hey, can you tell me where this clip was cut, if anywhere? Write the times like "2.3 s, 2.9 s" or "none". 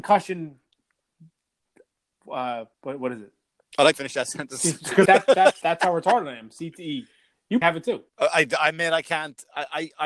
2.7 s, 3.9 s, 5.1 s, 5.6 s, 7.6 s, 8.1 s